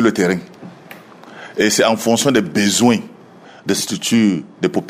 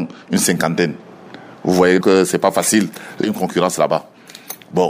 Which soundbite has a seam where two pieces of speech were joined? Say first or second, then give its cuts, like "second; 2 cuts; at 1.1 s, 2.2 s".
second; 2 cuts; at 2.0 s, 3.2 s